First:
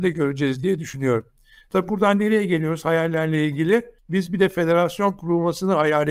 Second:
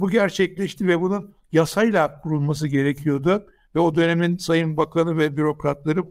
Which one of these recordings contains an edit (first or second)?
first